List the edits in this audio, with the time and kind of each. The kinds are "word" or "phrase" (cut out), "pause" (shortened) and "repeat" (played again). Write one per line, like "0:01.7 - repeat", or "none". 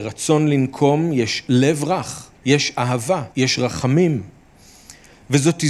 0:02.3 - pause
0:03.3 - pause